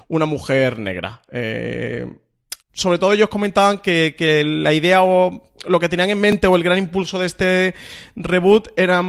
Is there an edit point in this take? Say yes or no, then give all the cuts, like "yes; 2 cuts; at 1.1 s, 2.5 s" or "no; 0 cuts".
yes; 1 cut; at 2.6 s